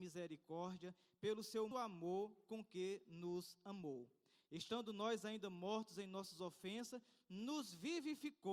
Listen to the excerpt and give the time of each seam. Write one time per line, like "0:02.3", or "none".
0:01.7